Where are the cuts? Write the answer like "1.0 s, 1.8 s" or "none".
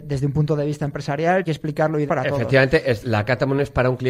1.4 s, 2.1 s, 3.0 s